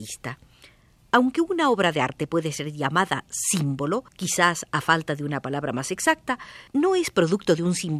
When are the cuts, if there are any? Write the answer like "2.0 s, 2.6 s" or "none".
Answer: 4.1 s, 6.7 s

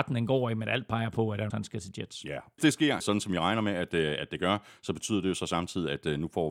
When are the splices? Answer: 1.5 s, 2.6 s, 3.0 s

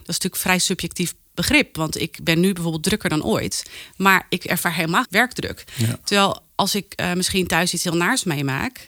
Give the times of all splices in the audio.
5.0 s

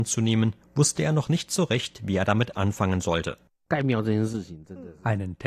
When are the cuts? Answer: none

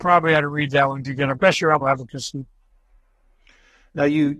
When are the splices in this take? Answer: 1.0 s, 1.4 s, 1.8 s

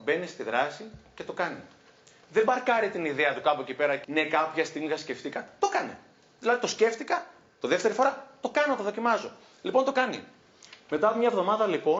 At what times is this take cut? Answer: 4.0 s

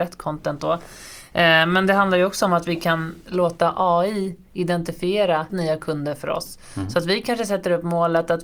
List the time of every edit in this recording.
5.5 s

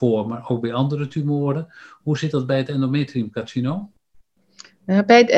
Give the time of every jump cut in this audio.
none

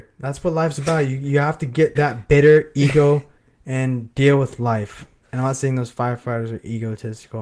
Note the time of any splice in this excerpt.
2.0 s, 3.4 s, 5.2 s

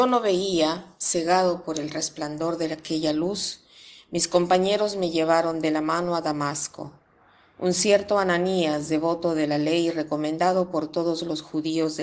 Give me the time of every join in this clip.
none

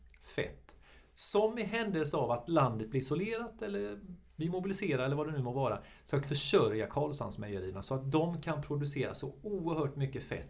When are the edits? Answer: 6.2 s

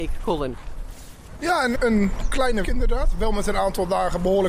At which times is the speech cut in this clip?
1.8 s, 2.6 s

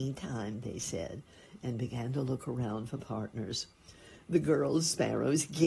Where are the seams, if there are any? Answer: none

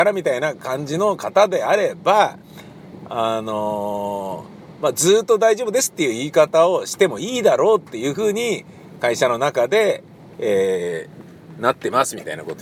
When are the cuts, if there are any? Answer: none

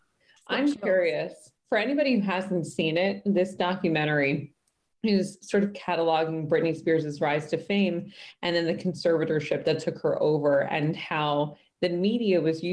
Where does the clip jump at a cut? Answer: none

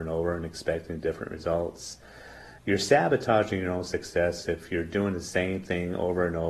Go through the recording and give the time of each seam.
2.6 s

